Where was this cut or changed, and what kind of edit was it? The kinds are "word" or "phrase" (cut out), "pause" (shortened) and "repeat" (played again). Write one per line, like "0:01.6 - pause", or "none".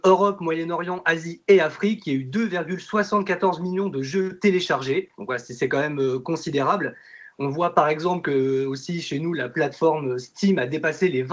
0:05.1 - pause